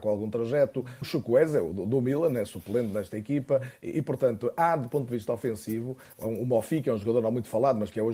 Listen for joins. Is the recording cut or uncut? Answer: cut